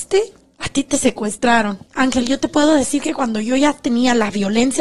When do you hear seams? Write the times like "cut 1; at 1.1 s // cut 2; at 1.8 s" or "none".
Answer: cut 1; at 1.9 s